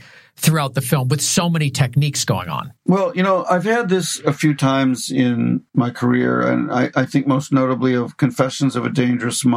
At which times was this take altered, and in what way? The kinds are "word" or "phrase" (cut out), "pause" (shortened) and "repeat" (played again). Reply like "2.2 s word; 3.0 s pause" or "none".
2.8 s pause; 5.7 s pause